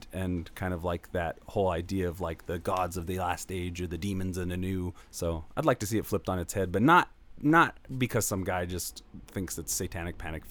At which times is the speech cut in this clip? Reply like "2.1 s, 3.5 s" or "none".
5.0 s, 9.2 s